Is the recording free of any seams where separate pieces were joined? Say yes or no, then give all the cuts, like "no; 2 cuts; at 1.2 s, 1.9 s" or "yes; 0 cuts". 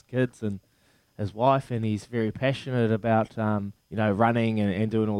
no; 1 cut; at 3.8 s